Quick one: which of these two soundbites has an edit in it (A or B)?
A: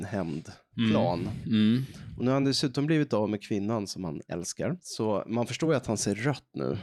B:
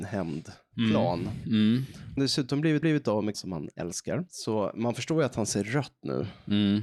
B